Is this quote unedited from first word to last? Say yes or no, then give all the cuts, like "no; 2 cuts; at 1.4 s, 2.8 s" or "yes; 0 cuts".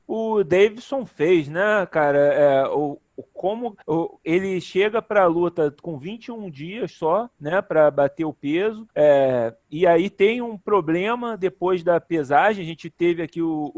no; 3 cuts; at 3.8 s, 7.3 s, 8.9 s